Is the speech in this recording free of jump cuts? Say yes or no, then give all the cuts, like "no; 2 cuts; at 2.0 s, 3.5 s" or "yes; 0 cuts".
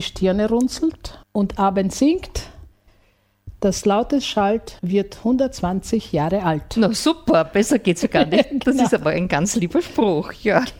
no; 2 cuts; at 1.2 s, 4.8 s